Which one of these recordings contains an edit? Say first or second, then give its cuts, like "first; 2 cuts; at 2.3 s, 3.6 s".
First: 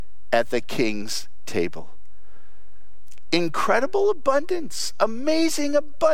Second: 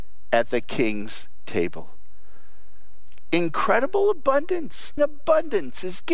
second; 1 cut; at 5.0 s